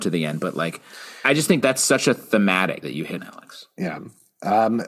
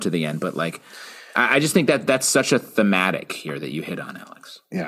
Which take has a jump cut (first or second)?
first